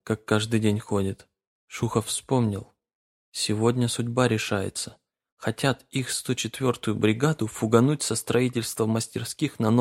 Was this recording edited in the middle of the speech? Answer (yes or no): no